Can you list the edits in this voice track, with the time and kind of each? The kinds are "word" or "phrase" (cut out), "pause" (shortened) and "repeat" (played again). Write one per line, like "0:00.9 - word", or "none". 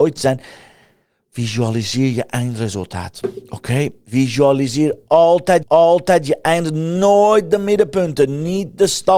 0:05.6 - repeat